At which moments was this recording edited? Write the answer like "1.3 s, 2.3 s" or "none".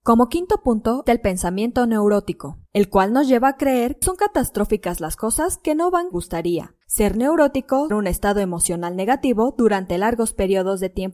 1.1 s, 2.7 s, 4.0 s, 6.1 s, 6.8 s, 7.9 s